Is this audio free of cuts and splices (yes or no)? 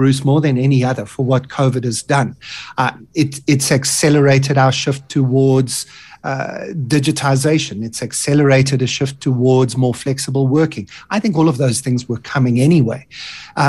yes